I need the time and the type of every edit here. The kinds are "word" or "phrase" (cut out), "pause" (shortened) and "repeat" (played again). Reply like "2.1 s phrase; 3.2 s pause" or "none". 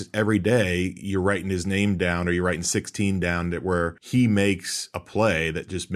4.0 s pause